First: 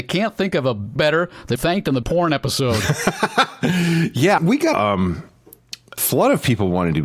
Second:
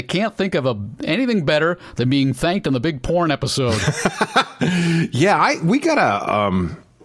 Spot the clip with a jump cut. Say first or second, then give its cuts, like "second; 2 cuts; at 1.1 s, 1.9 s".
first; 6 cuts; at 1.0 s, 1.6 s, 2.0 s, 4.4 s, 4.7 s, 6.0 s